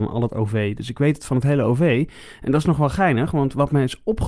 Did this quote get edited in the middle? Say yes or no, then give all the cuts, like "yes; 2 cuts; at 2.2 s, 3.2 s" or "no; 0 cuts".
no; 0 cuts